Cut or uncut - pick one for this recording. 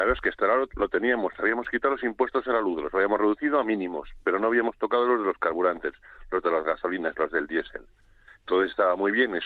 uncut